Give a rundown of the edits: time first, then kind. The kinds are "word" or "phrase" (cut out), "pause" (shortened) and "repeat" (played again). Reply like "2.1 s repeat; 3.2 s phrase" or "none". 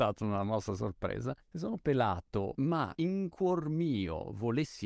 1.4 s pause